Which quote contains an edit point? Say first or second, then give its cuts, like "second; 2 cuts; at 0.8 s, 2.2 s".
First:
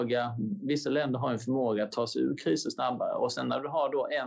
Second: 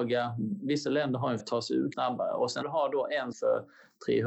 second; 4 cuts; at 1.4 s, 1.9 s, 2.6 s, 3.3 s